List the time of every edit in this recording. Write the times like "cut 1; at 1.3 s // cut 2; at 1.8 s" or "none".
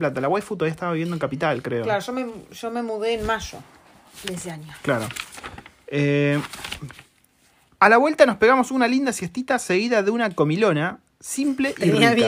none

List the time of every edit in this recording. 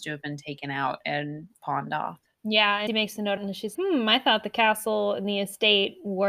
cut 1; at 1.5 s // cut 2; at 2.9 s // cut 3; at 3.4 s // cut 4; at 3.7 s

